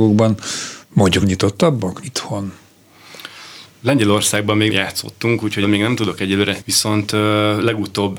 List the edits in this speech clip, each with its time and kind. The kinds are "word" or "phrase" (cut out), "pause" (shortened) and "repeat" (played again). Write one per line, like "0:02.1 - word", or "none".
0:01.2 - word
0:02.0 - word
0:04.7 - word
0:05.6 - word
0:06.6 - word